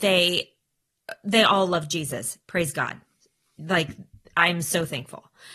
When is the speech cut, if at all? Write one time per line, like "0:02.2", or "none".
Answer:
none

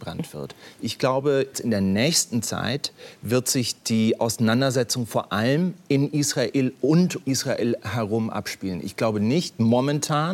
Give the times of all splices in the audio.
0:01.5
0:07.2

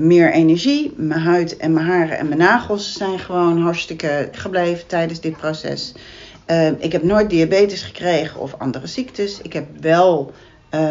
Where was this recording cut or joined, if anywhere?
0:04.3

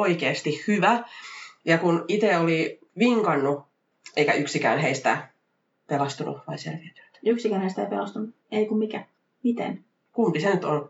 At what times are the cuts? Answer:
0:08.4

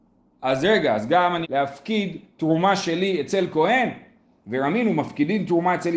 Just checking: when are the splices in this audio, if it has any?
0:01.4

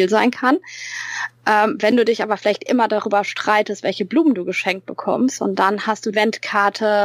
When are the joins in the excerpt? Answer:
0:02.7
0:06.1

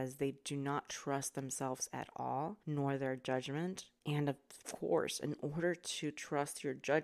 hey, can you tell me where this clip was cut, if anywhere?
0:02.6
0:04.0

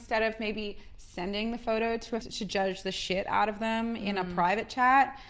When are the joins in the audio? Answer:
0:02.2

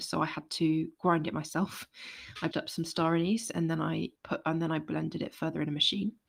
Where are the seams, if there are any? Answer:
0:02.5
0:04.2

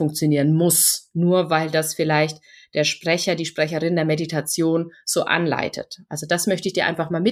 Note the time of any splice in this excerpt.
none

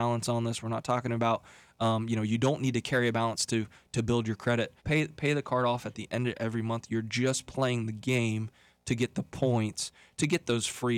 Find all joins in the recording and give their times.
0:04.8

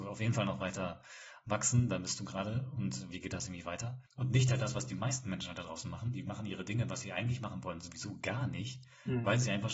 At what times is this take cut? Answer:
0:04.1

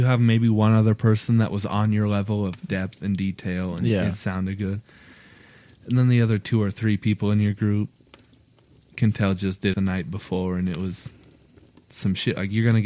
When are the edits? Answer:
0:09.7

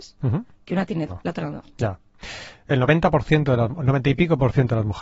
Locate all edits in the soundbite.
0:01.1

